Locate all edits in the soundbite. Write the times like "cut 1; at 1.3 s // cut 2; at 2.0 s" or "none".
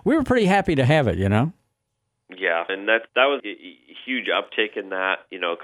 cut 1; at 2.7 s // cut 2; at 3.1 s // cut 3; at 3.4 s